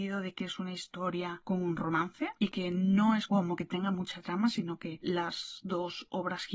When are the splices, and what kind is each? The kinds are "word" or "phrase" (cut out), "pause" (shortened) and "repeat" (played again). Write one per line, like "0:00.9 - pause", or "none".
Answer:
none

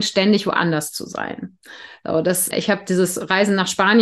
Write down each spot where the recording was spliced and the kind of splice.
0:02.5 - word

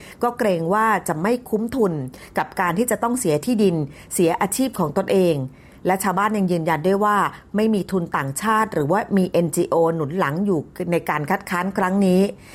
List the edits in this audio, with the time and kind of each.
none

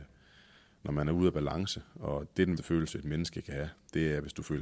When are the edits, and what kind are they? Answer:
0:02.6 - word

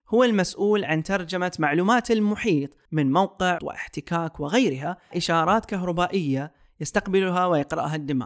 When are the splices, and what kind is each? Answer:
0:02.9 - pause
0:03.6 - word
0:05.1 - word

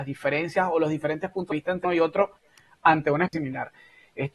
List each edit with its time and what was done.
0:01.5 - word
0:01.8 - word
0:03.3 - word

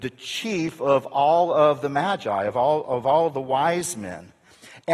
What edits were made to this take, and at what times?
none

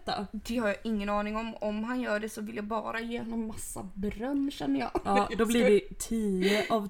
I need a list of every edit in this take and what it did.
none

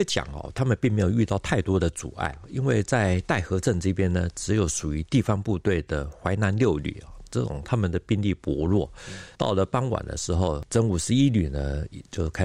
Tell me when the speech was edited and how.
0:09.4 - word

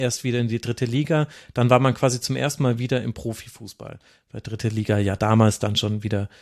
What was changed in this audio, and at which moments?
none

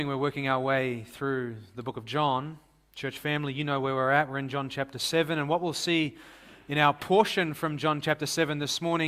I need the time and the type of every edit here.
none

